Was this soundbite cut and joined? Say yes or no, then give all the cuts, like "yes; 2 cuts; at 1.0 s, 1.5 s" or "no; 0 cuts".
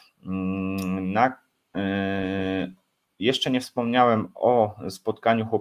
no; 0 cuts